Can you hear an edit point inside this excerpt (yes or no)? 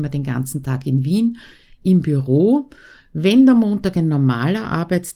no